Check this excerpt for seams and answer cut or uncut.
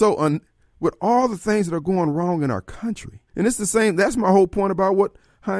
cut